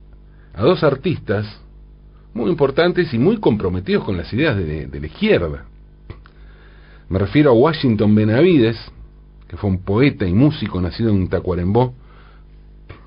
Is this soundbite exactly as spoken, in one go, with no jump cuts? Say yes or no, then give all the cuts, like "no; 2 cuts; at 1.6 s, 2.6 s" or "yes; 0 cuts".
yes; 0 cuts